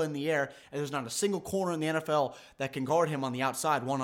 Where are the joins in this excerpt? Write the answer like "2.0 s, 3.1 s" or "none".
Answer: none